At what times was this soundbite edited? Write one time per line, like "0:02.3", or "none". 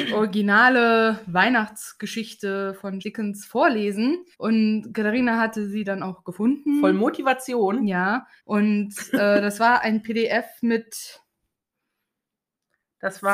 0:03.0
0:04.3
0:08.4